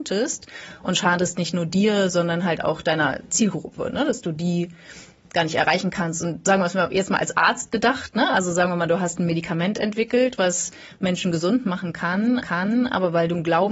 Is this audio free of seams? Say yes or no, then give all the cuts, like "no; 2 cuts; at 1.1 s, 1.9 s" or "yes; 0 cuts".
no; 1 cut; at 12.4 s